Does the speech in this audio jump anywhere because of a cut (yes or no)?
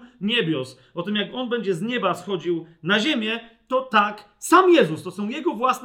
no